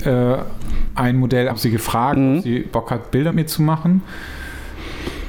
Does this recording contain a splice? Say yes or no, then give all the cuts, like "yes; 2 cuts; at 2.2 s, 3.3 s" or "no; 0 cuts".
yes; 3 cuts; at 1.5 s, 2.7 s, 3.3 s